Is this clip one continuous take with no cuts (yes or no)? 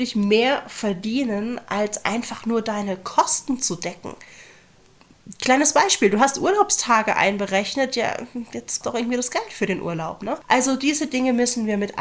no